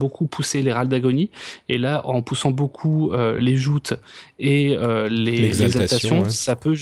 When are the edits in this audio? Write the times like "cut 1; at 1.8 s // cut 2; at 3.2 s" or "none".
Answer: cut 1; at 3.4 s